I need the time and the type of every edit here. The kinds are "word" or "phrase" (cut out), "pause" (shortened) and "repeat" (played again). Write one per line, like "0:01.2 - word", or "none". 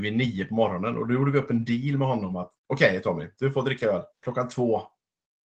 0:02.6 - pause
0:04.1 - pause